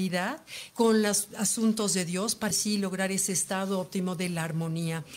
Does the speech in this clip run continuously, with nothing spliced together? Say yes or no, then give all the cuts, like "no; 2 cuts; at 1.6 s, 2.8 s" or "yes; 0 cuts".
no; 1 cut; at 2.5 s